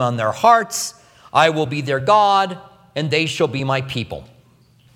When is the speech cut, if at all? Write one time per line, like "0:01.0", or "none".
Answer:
none